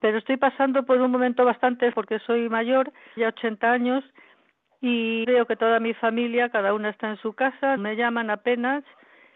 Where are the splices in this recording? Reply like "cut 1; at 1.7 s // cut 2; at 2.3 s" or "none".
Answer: cut 1; at 1.9 s // cut 2; at 3.2 s // cut 3; at 5.2 s // cut 4; at 7.8 s

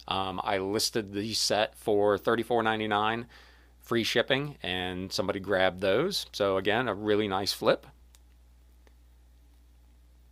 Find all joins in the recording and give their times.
none

